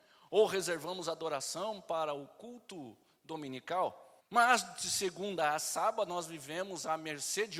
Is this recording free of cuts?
no; 1 cut; at 4.2 s

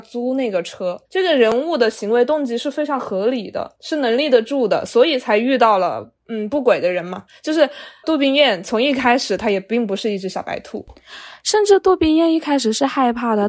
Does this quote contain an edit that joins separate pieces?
yes; 1 cut; at 1.0 s

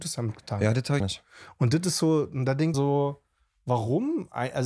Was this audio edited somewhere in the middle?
yes; 2 cuts; at 1.0 s, 2.7 s

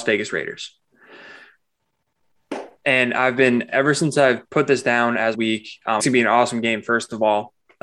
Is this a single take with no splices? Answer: no; 4 cuts; at 2.8 s, 4.5 s, 5.3 s, 6.0 s

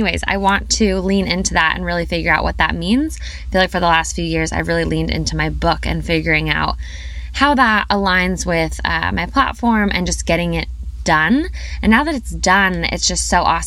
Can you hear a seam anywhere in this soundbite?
no; 0 cuts

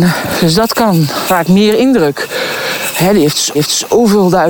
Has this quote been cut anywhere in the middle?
yes; 2 cuts; at 1.3 s, 3.5 s

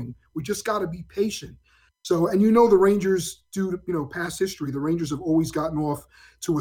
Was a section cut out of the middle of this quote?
no; 0 cuts

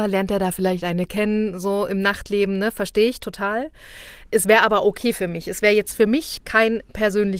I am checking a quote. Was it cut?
no; 0 cuts

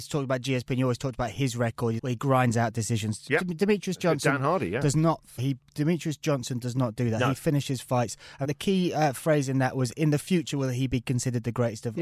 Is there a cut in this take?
yes; 3 cuts; at 2.0 s, 5.4 s, 8.4 s

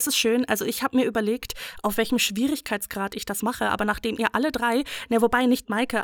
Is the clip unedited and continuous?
yes; 0 cuts

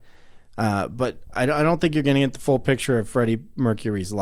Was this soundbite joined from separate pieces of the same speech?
no; 0 cuts

